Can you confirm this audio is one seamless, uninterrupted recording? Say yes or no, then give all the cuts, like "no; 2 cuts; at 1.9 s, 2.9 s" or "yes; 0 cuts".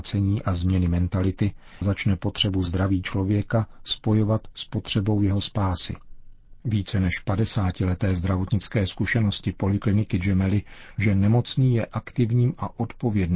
no; 3 cuts; at 1.8 s, 6.6 s, 11.0 s